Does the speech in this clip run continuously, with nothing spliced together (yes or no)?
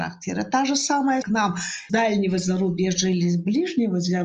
no